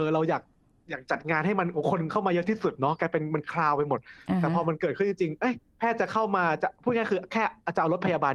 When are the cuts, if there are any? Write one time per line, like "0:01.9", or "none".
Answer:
0:05.7